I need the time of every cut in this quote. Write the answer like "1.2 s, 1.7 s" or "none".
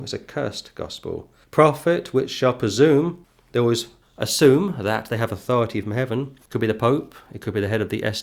none